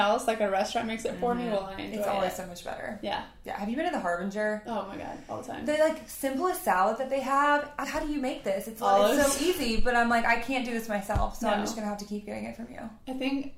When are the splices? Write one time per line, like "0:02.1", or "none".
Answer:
0:07.8